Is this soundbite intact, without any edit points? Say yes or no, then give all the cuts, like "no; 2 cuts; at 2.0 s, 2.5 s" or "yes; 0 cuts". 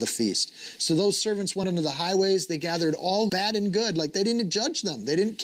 no; 2 cuts; at 1.6 s, 3.3 s